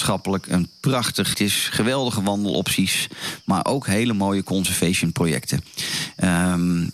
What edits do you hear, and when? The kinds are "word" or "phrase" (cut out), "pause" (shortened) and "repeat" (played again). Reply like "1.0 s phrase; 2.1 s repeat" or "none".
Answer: 1.3 s word